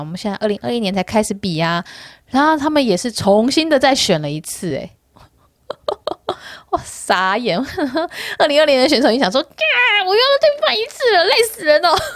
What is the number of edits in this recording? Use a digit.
0